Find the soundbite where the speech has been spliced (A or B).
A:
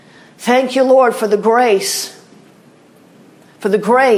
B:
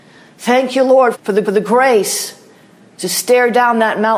B